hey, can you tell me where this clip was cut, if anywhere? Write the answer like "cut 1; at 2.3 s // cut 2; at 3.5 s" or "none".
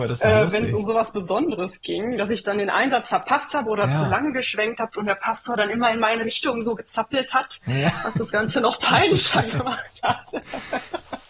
none